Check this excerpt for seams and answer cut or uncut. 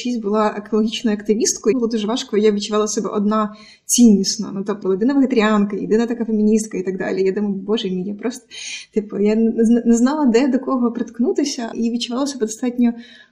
cut